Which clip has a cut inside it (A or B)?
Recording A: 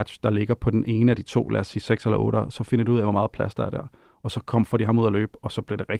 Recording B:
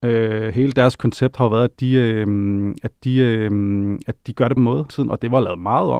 B